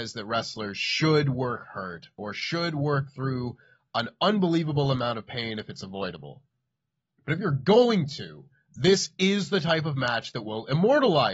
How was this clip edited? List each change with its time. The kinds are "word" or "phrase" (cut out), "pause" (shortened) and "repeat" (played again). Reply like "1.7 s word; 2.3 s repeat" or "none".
none